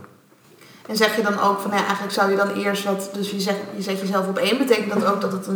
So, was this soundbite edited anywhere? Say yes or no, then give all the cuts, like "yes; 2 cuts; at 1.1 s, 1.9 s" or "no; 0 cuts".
no; 0 cuts